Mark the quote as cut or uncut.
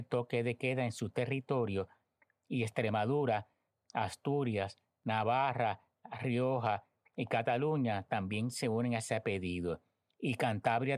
uncut